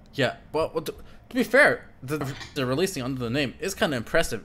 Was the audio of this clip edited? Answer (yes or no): yes